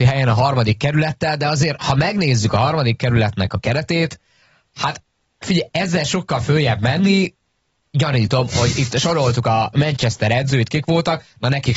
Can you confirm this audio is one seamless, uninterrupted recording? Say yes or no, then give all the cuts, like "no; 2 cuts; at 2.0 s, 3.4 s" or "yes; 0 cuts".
yes; 0 cuts